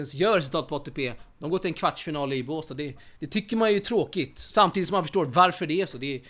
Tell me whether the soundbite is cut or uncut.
cut